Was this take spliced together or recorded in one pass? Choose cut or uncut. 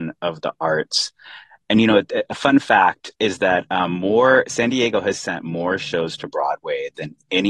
cut